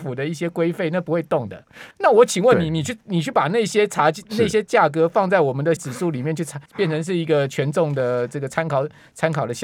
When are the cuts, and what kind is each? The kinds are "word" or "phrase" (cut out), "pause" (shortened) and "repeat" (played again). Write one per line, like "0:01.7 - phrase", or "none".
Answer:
0:01.9 - pause
0:05.8 - word
0:06.7 - pause